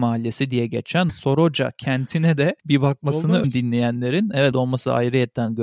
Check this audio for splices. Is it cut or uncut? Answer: cut